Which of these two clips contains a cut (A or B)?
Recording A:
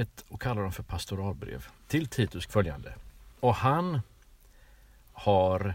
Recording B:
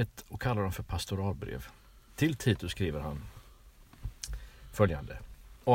A